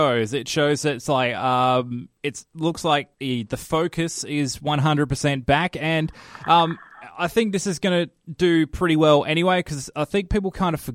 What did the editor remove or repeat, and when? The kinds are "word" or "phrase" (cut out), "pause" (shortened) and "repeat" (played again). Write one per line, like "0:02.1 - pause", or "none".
0:03.1 - pause